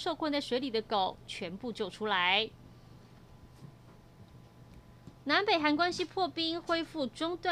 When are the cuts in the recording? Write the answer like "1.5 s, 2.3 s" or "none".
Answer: 5.2 s